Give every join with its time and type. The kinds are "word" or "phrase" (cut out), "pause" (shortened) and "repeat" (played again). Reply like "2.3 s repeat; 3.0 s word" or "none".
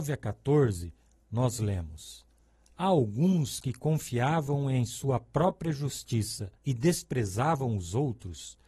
6.6 s pause